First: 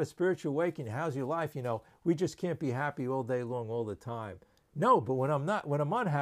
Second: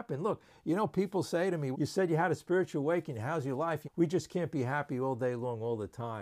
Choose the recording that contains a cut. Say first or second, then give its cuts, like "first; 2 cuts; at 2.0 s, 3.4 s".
second; 2 cuts; at 1.7 s, 3.8 s